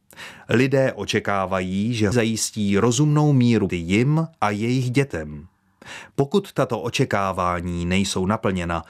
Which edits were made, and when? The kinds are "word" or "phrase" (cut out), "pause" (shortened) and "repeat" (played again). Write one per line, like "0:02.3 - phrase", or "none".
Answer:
0:02.1 - word
0:03.7 - word